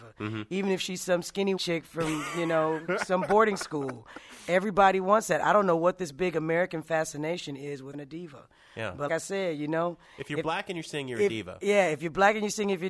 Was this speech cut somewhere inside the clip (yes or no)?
yes